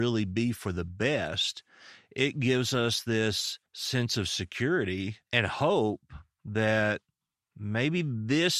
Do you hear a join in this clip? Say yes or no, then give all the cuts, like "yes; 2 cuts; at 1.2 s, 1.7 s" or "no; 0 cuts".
yes; 2 cuts; at 3.7 s, 5.2 s